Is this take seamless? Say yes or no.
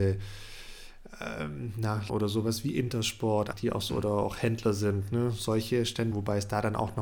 no